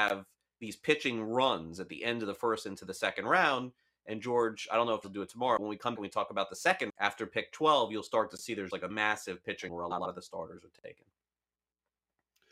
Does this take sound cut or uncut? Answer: cut